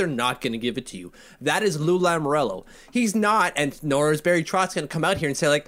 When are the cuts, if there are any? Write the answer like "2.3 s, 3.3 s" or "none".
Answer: none